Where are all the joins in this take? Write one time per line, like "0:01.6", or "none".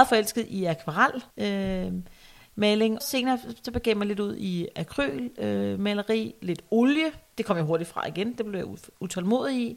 0:01.3
0:03.0